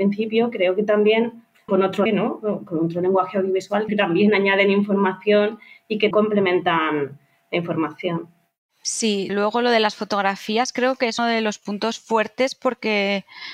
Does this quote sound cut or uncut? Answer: cut